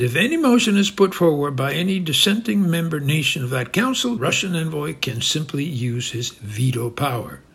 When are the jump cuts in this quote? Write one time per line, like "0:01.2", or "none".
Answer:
0:04.2